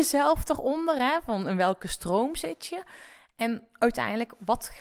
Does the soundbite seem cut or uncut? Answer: uncut